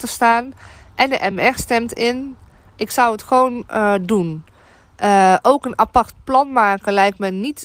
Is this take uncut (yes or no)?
yes